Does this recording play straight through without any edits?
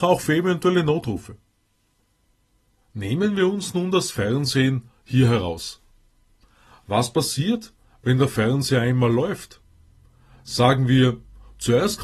yes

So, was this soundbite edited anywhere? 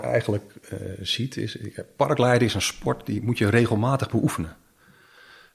no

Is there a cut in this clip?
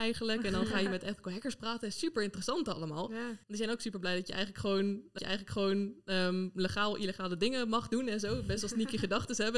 yes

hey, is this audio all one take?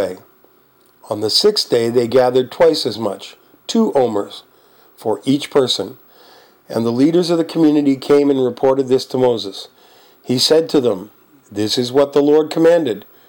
yes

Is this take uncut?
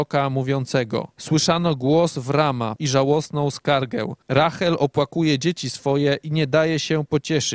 no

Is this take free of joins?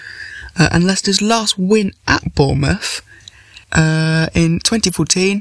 no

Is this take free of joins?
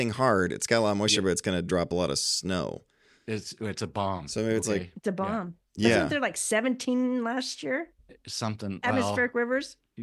yes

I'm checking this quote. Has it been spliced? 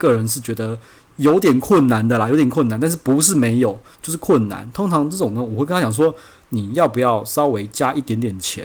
no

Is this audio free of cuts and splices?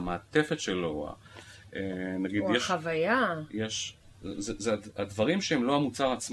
yes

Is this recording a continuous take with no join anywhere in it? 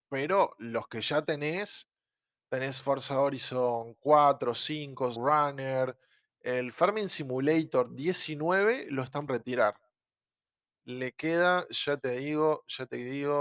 no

